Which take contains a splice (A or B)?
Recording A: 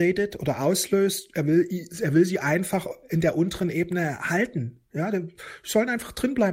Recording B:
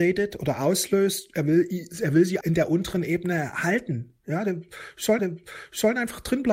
B